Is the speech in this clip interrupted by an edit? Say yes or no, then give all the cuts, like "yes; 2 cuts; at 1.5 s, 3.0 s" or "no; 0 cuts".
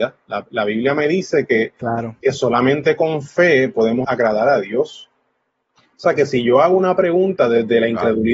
yes; 1 cut; at 4.0 s